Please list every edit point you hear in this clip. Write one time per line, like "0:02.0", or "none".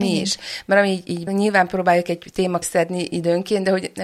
0:01.3
0:02.6